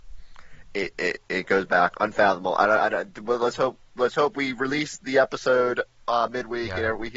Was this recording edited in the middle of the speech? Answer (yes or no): no